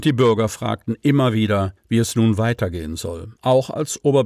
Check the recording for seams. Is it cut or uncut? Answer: cut